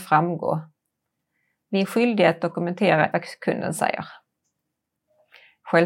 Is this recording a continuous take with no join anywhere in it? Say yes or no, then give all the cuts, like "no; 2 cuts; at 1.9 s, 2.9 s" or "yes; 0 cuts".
no; 1 cut; at 3.1 s